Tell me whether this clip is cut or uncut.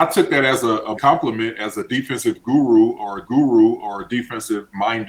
cut